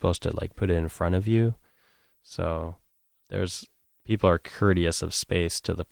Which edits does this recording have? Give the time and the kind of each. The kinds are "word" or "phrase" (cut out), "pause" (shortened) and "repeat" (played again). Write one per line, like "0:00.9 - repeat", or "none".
0:03.2 - word